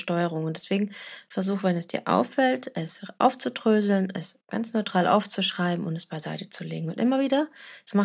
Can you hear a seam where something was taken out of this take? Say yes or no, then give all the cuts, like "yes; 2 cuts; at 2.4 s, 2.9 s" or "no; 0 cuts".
no; 0 cuts